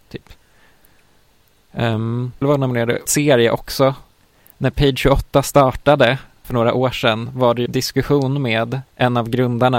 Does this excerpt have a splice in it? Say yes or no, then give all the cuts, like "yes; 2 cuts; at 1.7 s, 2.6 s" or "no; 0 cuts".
yes; 5 cuts; at 2.4 s, 3.1 s, 6.4 s, 7.7 s, 8.8 s